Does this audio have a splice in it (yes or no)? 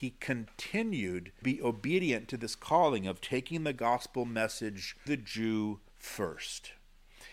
yes